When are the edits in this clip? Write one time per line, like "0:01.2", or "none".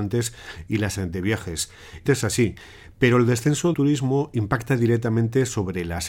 0:01.0
0:02.1
0:03.7